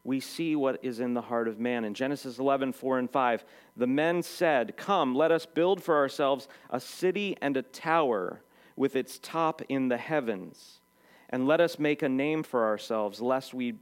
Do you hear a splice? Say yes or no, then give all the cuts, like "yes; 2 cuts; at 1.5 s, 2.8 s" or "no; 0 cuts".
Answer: no; 0 cuts